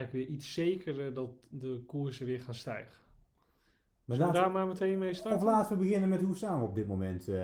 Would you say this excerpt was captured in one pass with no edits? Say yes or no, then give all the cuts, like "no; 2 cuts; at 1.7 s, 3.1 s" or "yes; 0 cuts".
yes; 0 cuts